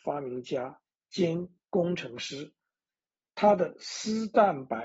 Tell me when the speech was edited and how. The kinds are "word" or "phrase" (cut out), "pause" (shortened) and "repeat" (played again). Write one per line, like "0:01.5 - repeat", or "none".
none